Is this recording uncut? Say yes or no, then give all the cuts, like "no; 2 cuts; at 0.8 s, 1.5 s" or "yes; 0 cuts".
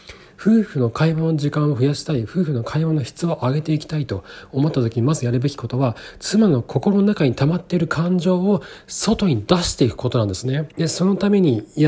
no; 1 cut; at 10.7 s